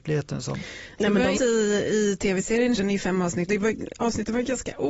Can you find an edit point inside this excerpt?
yes; 3 cuts; at 1.3 s, 2.8 s, 3.5 s

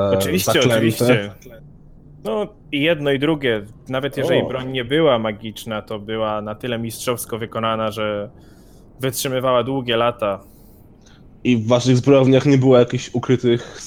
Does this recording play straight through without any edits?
yes; 0 cuts

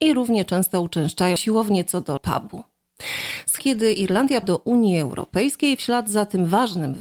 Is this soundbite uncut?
no; 4 cuts; at 1.4 s, 2.2 s, 3.6 s, 4.4 s

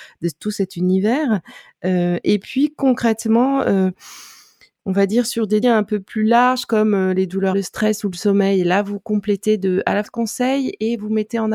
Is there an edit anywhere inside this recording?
yes; 3 cuts; at 5.6 s, 7.5 s, 10.0 s

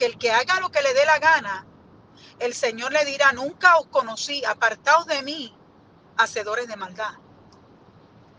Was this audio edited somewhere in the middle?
no; 0 cuts

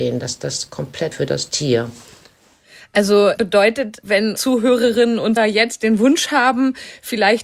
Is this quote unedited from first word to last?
no; 4 cuts; at 1.1 s, 3.4 s, 4.4 s, 5.4 s

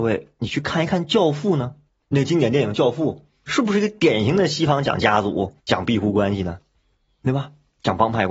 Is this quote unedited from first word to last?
no; 2 cuts; at 1.9 s, 5.6 s

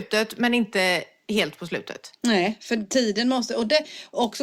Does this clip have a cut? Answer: no; 0 cuts

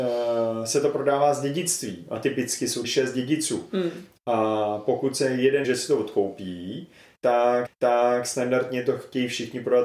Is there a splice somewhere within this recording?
yes; 3 cuts; at 2.8 s, 5.6 s, 7.7 s

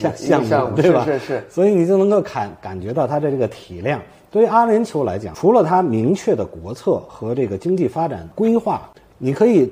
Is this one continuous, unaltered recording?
yes; 0 cuts

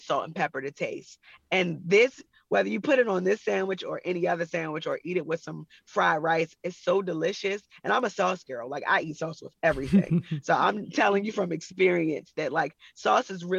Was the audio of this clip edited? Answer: no; 0 cuts

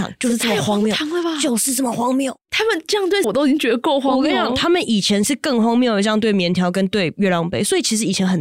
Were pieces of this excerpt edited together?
yes; 1 cut; at 3.2 s

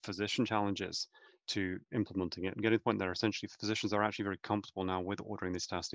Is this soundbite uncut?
yes; 0 cuts

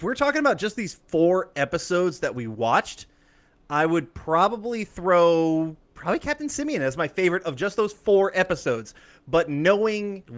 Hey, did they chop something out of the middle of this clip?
no; 0 cuts

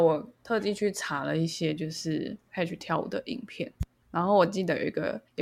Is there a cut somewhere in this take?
no; 0 cuts

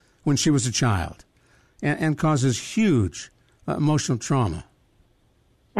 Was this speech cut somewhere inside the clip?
no; 0 cuts

